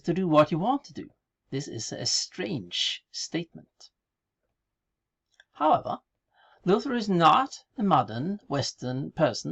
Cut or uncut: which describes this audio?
uncut